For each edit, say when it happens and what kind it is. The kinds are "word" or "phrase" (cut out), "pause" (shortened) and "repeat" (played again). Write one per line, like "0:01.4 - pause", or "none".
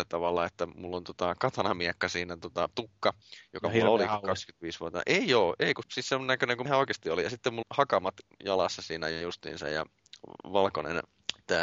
0:02.7 - word
0:05.8 - word
0:06.7 - word
0:07.6 - word